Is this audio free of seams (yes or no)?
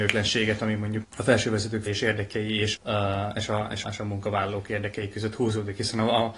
no